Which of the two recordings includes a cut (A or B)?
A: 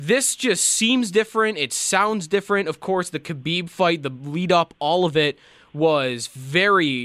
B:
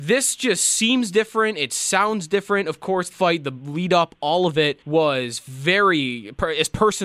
B